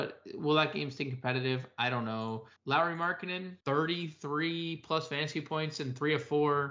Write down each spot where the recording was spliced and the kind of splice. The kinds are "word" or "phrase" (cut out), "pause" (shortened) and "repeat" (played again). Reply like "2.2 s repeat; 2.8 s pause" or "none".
none